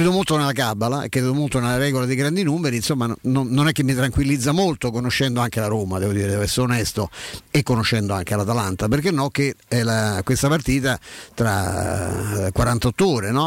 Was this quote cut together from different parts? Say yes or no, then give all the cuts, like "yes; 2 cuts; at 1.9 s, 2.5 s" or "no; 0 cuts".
no; 0 cuts